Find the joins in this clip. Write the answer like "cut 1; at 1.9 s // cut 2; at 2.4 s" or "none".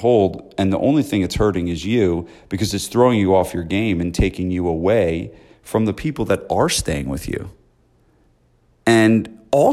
none